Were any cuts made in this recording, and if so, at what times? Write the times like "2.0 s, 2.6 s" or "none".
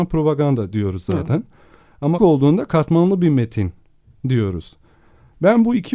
2.2 s

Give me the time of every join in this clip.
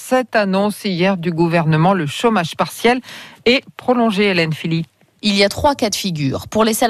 none

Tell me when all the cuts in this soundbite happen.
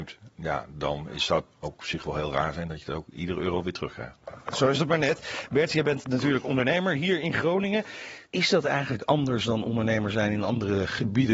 1.5 s, 8.3 s

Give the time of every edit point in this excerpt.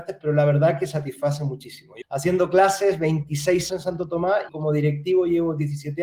2.0 s, 3.7 s, 4.5 s

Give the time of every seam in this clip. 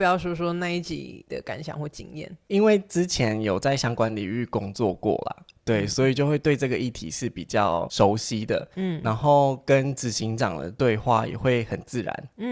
none

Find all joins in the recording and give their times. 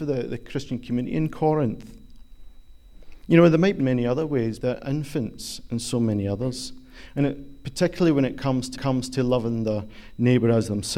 3.8 s, 4.6 s, 8.7 s

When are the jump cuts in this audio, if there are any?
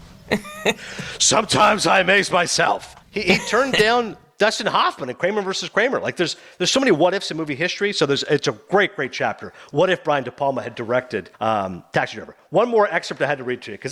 3.0 s, 11.3 s

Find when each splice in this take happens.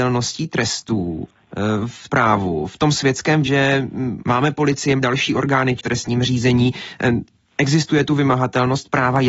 2.1 s, 3.4 s, 4.2 s, 5.0 s, 5.8 s

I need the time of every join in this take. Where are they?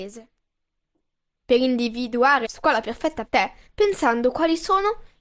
2.4 s, 3.2 s, 3.7 s

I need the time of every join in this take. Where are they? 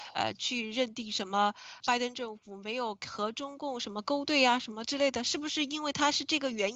1.8 s

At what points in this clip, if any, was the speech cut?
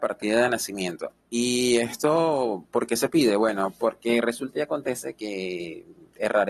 1.2 s

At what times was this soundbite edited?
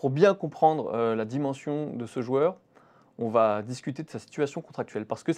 none

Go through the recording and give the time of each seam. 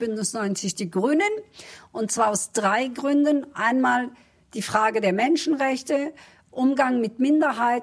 none

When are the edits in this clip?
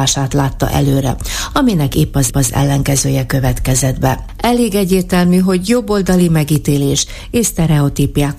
2.3 s

